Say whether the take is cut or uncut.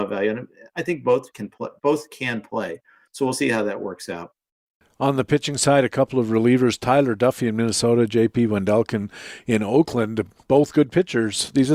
uncut